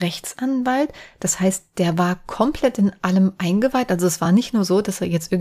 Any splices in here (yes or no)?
no